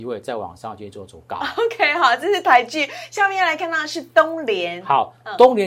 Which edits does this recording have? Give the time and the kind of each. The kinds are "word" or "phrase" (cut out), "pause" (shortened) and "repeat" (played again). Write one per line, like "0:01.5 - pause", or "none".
none